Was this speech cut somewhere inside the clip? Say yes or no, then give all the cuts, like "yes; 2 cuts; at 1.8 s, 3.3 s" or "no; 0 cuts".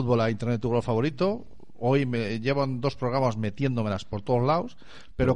no; 0 cuts